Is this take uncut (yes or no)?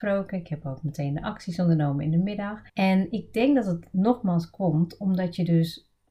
no